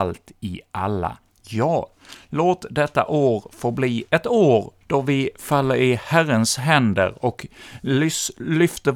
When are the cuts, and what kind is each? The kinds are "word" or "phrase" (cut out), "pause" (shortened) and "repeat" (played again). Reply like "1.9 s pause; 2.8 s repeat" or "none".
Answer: 4.8 s pause